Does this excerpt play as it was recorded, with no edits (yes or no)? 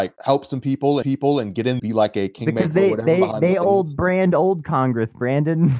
no